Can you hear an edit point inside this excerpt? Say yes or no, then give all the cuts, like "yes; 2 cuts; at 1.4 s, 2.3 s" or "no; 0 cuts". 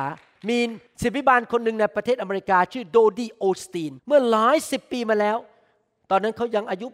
yes; 1 cut; at 4.0 s